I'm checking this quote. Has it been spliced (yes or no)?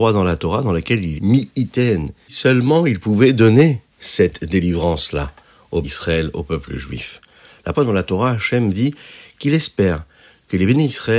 yes